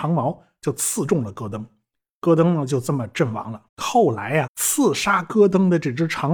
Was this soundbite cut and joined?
yes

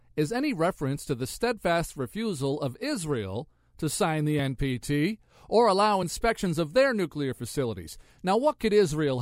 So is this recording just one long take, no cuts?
yes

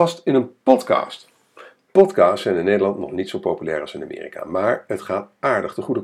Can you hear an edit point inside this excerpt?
no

